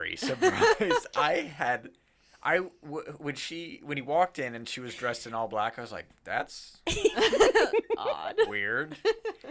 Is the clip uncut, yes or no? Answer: yes